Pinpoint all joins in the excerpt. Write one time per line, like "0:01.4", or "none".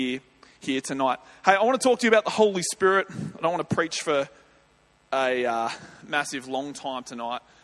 none